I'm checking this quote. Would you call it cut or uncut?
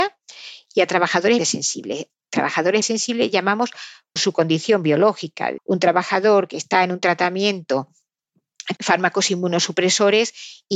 cut